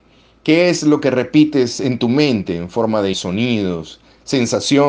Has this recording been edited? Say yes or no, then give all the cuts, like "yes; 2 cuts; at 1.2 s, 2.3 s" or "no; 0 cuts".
yes; 1 cut; at 3.1 s